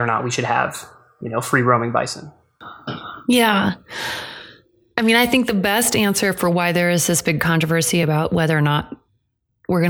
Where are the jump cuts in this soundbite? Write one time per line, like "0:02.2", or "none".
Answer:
none